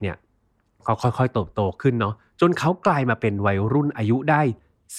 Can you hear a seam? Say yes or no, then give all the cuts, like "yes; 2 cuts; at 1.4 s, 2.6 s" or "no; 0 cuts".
no; 0 cuts